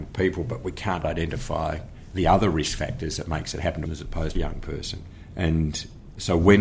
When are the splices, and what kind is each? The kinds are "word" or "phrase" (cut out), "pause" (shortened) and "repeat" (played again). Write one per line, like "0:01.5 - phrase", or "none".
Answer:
0:01.0 - word
0:03.8 - phrase
0:04.3 - phrase